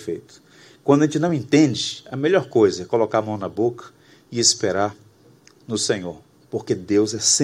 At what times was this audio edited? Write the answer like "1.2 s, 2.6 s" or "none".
none